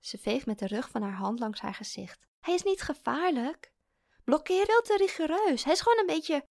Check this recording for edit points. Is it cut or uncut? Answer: cut